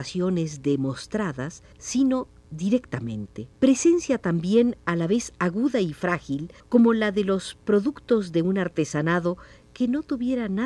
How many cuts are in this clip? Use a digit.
3